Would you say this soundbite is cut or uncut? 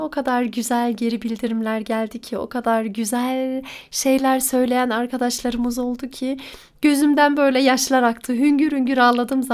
uncut